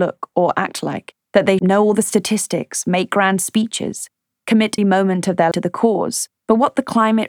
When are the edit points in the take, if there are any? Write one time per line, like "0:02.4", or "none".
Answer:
0:01.2
0:01.6
0:04.8
0:05.5
0:06.4